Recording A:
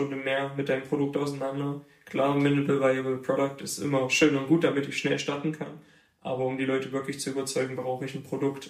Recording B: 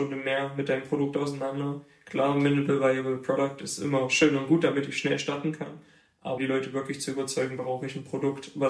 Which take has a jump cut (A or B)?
B